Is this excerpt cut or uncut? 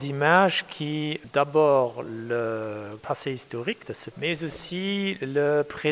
cut